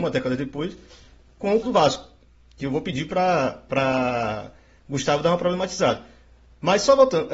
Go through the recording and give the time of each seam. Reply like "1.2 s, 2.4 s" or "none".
1.6 s